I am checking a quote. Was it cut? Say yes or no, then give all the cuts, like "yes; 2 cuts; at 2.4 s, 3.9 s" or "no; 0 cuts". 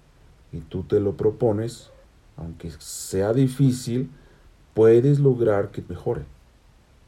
yes; 2 cuts; at 2.0 s, 5.9 s